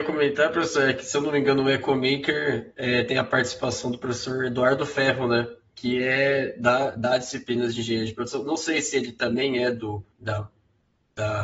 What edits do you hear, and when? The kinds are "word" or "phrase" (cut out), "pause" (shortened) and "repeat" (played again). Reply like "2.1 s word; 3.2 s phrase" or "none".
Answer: 10.1 s pause